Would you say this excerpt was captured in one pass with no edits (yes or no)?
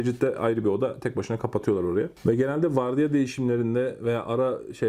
yes